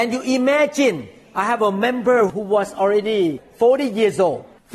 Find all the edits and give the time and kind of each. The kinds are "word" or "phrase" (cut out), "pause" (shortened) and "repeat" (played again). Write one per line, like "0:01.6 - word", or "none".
none